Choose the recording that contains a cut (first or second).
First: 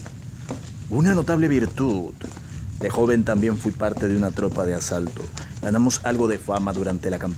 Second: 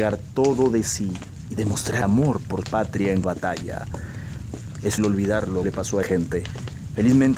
second